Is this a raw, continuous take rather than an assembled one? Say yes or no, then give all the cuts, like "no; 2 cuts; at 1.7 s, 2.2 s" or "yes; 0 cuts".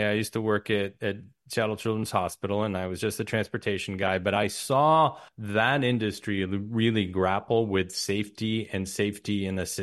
no; 1 cut; at 5.3 s